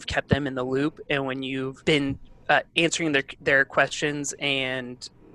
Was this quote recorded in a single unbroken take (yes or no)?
yes